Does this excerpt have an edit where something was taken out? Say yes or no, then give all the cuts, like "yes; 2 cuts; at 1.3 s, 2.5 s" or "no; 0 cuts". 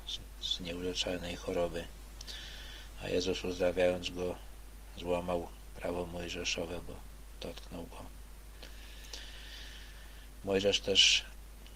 no; 0 cuts